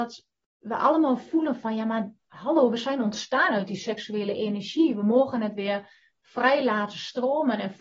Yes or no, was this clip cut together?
no